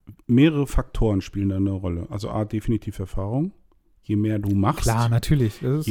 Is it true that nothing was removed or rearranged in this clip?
yes; 0 cuts

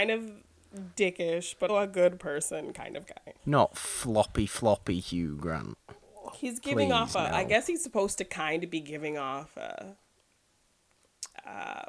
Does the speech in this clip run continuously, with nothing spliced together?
no; 2 cuts; at 1.7 s, 3.4 s

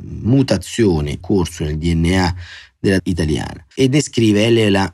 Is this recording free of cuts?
no; 3 cuts; at 1.2 s, 3.0 s, 3.7 s

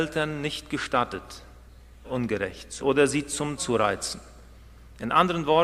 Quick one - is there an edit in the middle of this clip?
yes; 3 cuts; at 2.0 s, 2.8 s, 3.6 s

